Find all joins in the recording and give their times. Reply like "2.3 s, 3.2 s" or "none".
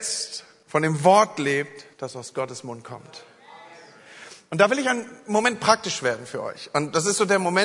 1.9 s